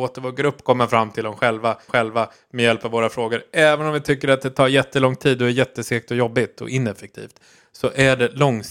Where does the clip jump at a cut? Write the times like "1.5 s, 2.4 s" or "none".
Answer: 1.9 s

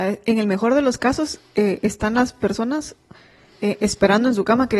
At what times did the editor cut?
none

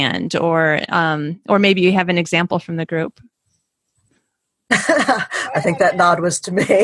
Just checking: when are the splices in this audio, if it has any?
3.3 s

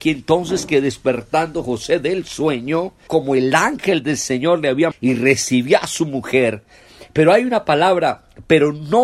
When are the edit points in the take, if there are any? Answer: 3.1 s, 4.9 s

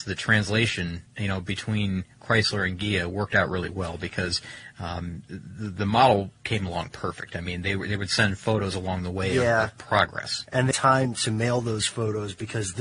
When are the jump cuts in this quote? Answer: 1.1 s, 6.4 s, 10.7 s

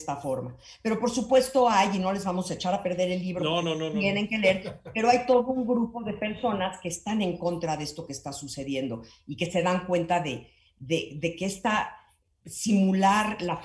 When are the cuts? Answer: none

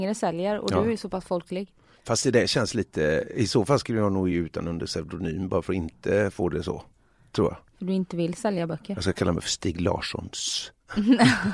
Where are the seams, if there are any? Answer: none

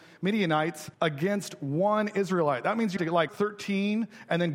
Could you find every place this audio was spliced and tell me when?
0.9 s, 3.0 s, 3.3 s

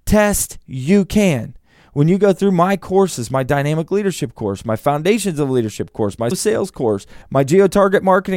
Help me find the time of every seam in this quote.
6.3 s, 7.2 s

